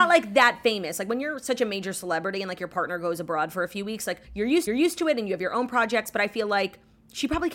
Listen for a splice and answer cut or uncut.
cut